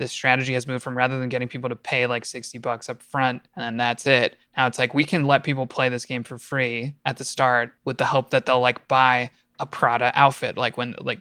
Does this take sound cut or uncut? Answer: cut